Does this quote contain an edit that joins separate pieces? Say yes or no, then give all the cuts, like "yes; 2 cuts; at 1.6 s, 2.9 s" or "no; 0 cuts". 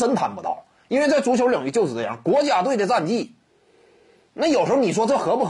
no; 0 cuts